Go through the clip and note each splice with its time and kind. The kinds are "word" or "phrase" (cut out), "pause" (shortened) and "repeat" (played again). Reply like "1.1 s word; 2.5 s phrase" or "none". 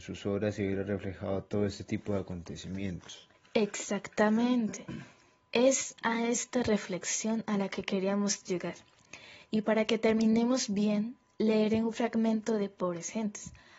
3.3 s pause